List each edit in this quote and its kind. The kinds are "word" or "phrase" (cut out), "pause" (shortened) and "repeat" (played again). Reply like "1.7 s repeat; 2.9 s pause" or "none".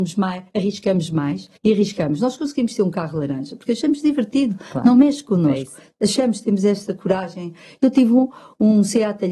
1.6 s pause